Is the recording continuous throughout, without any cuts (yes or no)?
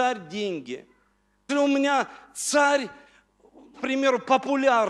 no